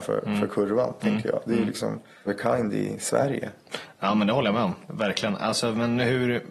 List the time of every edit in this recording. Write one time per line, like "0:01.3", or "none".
0:02.3